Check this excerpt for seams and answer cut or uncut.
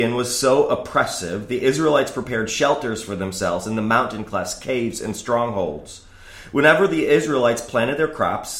uncut